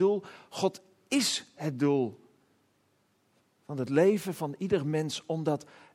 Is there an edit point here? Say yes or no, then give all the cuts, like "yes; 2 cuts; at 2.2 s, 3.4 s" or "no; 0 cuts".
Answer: no; 0 cuts